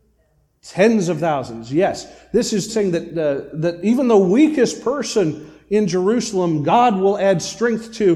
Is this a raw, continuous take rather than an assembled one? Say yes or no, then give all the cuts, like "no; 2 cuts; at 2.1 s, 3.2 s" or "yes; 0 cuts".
no; 1 cut; at 2.7 s